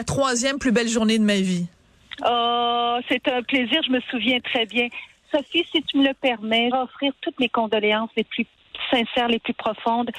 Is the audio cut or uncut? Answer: cut